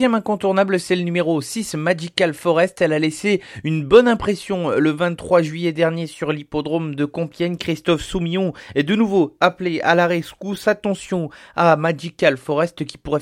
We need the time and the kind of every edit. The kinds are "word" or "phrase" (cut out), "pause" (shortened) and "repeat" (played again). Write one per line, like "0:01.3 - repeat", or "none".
none